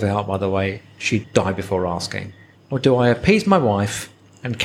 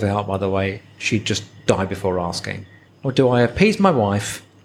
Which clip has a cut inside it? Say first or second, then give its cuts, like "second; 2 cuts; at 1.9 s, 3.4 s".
first; 1 cut; at 1.2 s